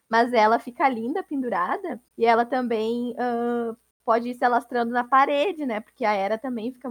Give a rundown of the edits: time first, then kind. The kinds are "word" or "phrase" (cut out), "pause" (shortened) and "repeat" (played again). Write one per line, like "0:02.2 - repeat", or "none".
0:02.1 - pause
0:03.9 - pause